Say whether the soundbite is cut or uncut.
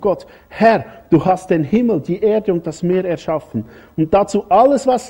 uncut